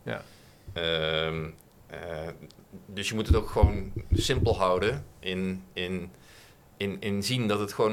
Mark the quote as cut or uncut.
uncut